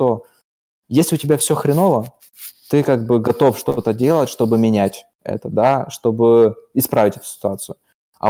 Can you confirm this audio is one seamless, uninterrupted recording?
yes; 0 cuts

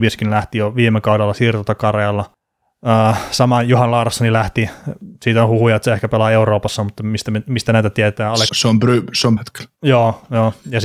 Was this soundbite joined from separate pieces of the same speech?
yes; 4 cuts; at 5.1 s, 8.5 s, 9.4 s, 9.7 s

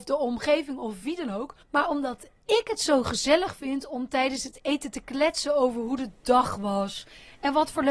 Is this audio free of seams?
no; 1 cut; at 1.6 s

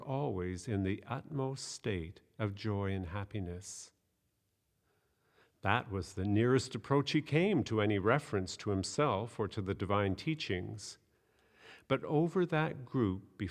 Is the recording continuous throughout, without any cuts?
yes; 0 cuts

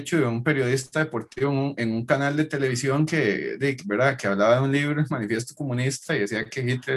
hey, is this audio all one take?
yes; 0 cuts

